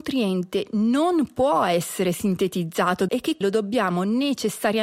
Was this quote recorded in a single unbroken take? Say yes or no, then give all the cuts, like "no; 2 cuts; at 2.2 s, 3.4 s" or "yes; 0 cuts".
no; 2 cuts; at 3.1 s, 3.4 s